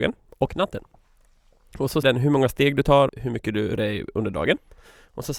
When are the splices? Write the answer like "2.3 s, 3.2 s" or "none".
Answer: 2.0 s, 3.1 s, 3.8 s